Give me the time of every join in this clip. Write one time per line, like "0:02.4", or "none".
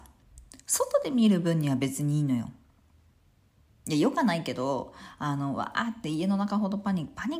none

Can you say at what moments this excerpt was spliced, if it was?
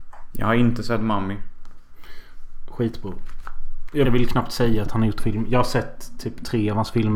0:04.1
0:05.2

